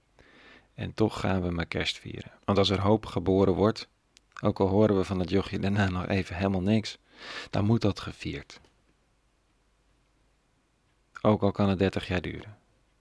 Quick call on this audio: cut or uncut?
cut